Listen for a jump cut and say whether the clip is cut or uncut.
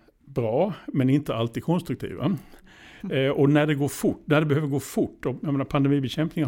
uncut